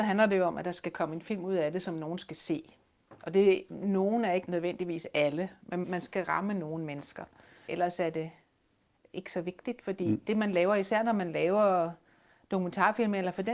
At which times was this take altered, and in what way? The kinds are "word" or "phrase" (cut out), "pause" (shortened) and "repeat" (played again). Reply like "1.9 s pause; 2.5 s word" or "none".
none